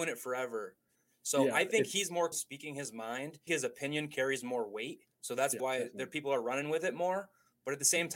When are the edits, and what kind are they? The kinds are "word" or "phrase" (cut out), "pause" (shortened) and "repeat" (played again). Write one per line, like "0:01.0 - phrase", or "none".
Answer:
0:02.3 - word
0:03.5 - phrase
0:05.1 - pause
0:05.6 - word